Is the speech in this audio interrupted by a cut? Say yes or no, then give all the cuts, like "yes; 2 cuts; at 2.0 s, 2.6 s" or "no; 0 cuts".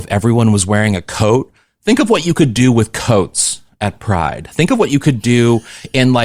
no; 0 cuts